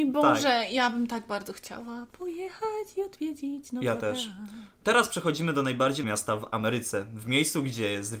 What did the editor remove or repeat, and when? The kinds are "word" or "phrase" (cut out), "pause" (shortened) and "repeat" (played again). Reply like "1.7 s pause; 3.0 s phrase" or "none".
6.0 s word